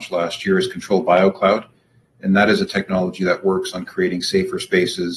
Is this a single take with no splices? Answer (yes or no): yes